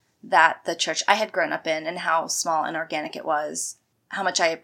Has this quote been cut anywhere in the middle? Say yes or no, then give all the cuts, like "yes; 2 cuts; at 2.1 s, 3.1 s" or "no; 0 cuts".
no; 0 cuts